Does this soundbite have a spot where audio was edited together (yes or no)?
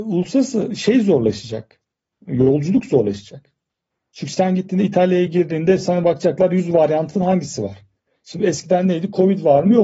no